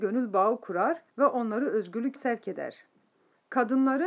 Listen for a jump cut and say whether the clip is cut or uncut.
cut